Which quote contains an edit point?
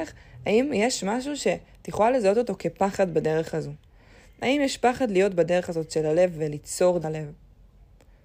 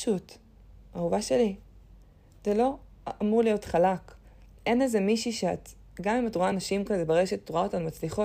first; 1 cut; at 7.0 s

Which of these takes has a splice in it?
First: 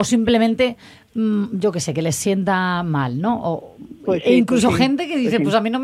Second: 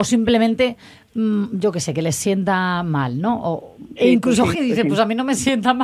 second; 2 cuts; at 4.0 s, 4.5 s

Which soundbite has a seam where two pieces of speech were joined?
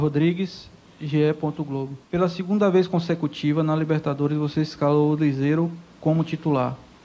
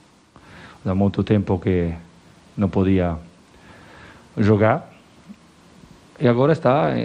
first; 1 cut; at 2.0 s

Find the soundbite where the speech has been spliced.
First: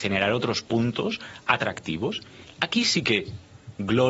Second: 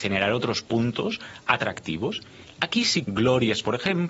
second; 1 cut; at 3.0 s

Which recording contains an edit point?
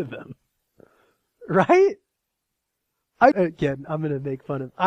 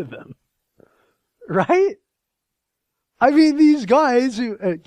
first; 1 cut; at 3.3 s

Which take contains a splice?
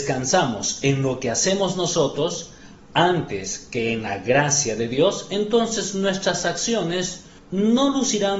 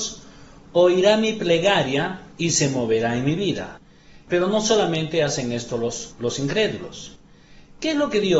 second; 1 cut; at 2.3 s

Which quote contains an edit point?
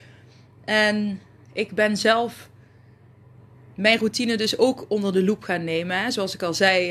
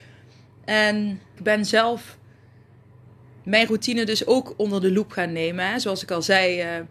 second; 1 cut; at 1.4 s

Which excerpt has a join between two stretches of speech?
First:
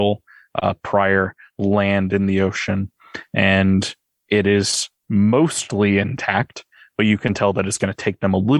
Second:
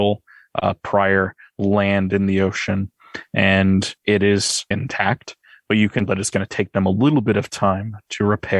second; 3 cuts; at 4.0 s, 4.7 s, 6.1 s

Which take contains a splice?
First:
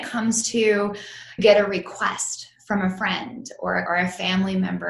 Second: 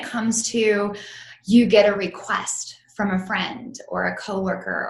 first; 2 cuts; at 1.4 s, 3.9 s

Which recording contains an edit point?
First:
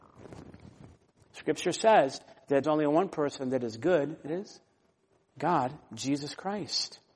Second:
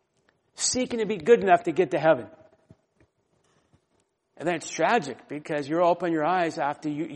first; 2 cuts; at 2.6 s, 4.3 s

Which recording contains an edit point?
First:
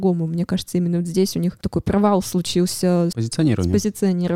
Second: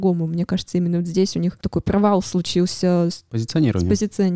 first; 1 cut; at 3.1 s

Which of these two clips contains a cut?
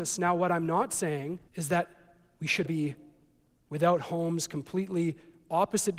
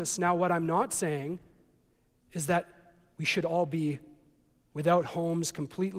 first; 2 cuts; at 1.5 s, 2.6 s

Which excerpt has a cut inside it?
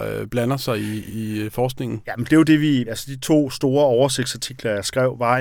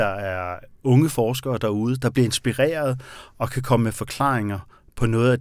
first; 2 cuts; at 1.1 s, 2.9 s

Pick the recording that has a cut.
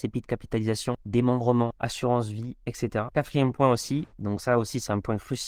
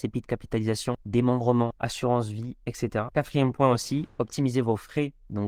first; 1 cut; at 4.1 s

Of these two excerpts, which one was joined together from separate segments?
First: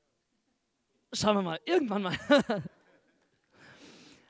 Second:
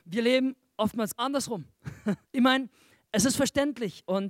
second; 2 cuts; at 1.2 s, 2.2 s

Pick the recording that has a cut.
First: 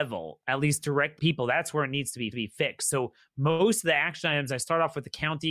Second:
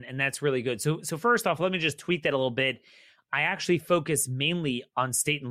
first; 2 cuts; at 1.2 s, 2.3 s

